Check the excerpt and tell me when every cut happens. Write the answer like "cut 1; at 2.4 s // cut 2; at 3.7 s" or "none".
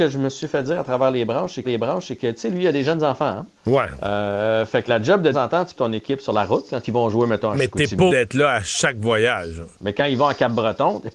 cut 1; at 1.6 s // cut 2; at 3.6 s // cut 3; at 4.9 s // cut 4; at 5.3 s // cut 5; at 5.8 s // cut 6; at 8.1 s // cut 7; at 9.7 s